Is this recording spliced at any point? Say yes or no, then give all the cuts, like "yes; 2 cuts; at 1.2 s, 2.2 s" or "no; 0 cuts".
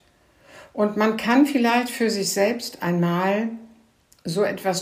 no; 0 cuts